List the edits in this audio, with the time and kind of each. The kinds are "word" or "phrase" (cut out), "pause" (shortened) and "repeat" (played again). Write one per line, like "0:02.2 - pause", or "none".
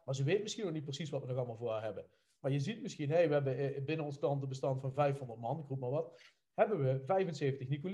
none